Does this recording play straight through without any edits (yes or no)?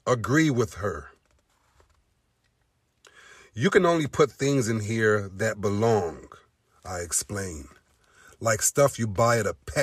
yes